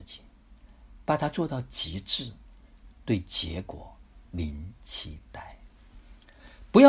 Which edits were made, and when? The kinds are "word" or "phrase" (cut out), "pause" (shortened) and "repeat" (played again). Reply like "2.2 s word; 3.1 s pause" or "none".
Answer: 4.3 s pause